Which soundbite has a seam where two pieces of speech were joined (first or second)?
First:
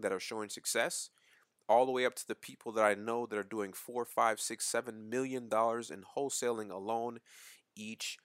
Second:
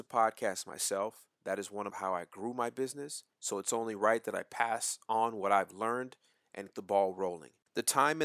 second